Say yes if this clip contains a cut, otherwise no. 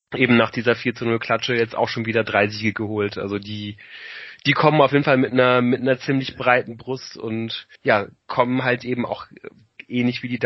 yes